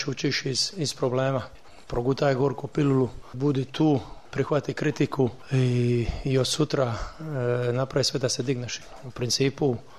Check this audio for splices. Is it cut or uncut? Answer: uncut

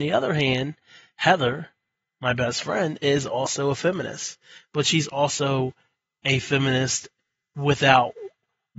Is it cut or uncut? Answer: uncut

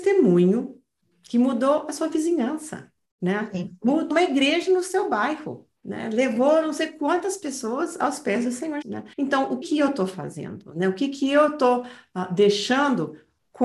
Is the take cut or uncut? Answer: cut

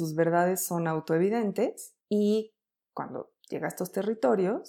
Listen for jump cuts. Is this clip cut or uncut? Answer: cut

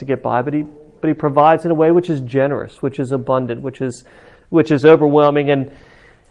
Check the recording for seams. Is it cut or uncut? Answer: uncut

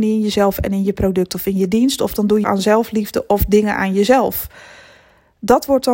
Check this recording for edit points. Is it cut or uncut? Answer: cut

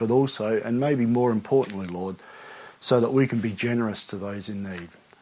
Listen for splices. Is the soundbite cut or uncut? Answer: uncut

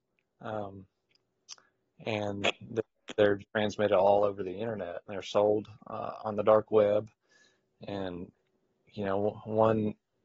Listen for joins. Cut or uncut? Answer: cut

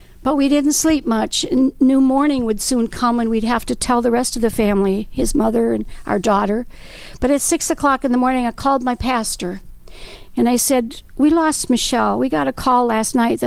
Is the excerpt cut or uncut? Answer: uncut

